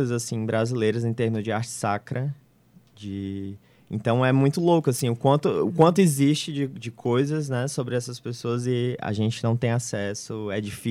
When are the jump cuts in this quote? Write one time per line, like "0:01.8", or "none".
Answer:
none